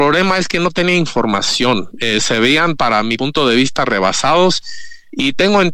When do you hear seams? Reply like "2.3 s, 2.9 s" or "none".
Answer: none